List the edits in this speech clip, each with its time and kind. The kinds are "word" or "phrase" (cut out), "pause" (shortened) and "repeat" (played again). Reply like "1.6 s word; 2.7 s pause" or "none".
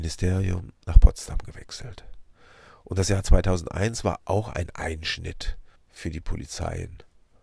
5.8 s pause